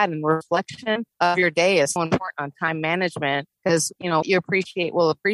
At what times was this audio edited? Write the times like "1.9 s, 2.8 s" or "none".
1.1 s, 2.0 s, 3.5 s, 4.2 s